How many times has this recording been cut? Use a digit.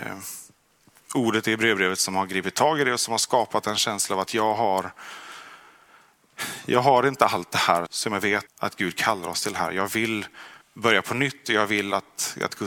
3